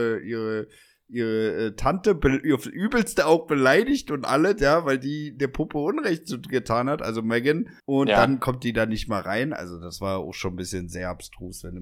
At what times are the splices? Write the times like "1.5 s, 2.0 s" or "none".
7.8 s